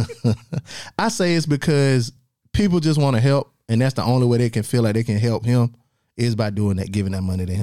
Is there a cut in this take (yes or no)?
no